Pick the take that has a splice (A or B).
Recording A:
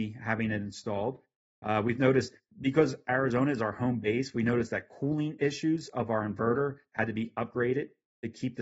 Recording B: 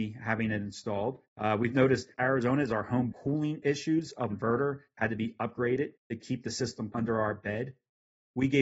B